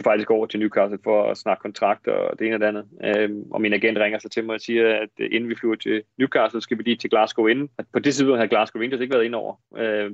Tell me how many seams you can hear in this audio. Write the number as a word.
one